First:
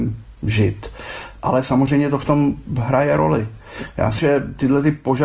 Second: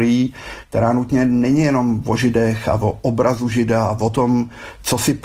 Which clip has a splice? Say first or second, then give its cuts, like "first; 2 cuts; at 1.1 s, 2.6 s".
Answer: first; 1 cut; at 4.2 s